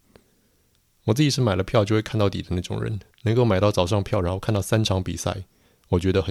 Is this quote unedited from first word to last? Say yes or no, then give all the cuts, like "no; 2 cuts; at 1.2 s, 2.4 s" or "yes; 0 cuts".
no; 1 cut; at 3.1 s